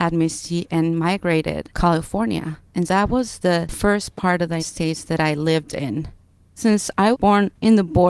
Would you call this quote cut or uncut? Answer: cut